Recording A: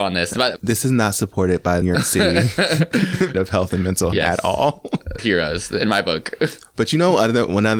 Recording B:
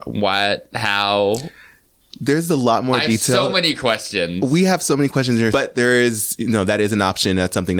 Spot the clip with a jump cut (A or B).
A